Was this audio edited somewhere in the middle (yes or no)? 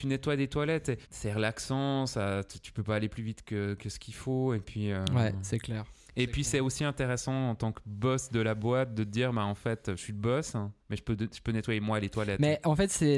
yes